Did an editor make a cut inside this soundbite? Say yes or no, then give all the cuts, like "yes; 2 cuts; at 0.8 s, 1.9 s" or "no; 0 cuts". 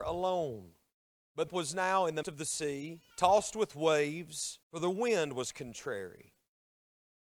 yes; 5 cuts; at 1.0 s, 1.5 s, 2.2 s, 3.1 s, 4.6 s